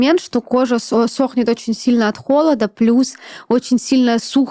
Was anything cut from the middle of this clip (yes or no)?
no